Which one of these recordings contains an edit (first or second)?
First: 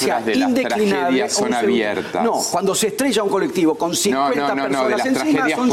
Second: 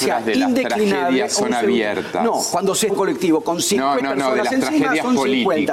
second